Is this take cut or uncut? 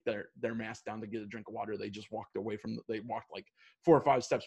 uncut